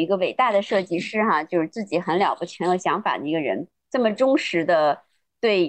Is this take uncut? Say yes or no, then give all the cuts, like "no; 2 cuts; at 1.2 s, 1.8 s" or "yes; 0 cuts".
no; 1 cut; at 3.8 s